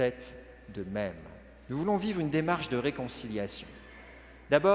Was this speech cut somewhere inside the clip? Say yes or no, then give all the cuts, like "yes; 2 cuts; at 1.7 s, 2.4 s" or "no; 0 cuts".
no; 0 cuts